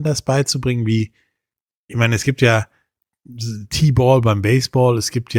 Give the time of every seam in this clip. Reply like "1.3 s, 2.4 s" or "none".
none